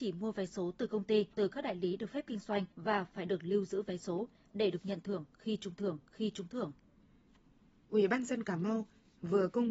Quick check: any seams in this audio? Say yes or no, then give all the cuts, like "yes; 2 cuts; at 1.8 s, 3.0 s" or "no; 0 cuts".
yes; 3 cuts; at 1.3 s, 2.7 s, 5.8 s